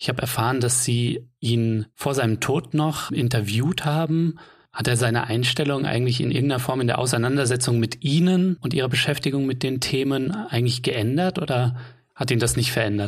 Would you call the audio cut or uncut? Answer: uncut